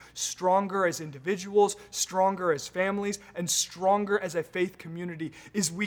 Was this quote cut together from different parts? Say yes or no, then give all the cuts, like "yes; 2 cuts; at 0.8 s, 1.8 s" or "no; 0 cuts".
no; 0 cuts